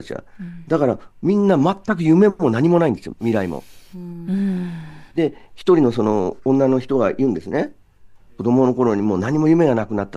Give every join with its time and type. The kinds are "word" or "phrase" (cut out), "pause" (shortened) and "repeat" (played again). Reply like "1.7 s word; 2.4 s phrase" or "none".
5.1 s pause